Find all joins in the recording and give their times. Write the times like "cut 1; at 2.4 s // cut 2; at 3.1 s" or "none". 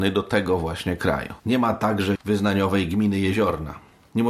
cut 1; at 1.4 s // cut 2; at 2.1 s